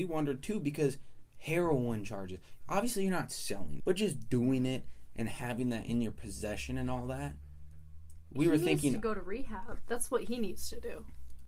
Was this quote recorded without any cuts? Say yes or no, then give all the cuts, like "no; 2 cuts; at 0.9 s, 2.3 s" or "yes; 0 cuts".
no; 1 cut; at 3.8 s